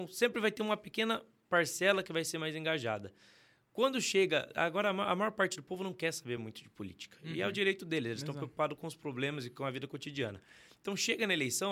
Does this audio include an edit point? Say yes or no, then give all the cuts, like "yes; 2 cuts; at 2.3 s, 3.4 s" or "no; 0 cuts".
no; 0 cuts